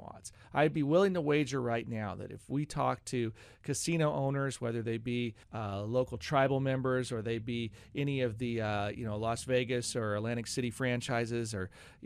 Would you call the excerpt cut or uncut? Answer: cut